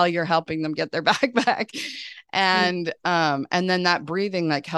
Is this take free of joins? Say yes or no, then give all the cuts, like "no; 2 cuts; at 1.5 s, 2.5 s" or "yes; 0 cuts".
yes; 0 cuts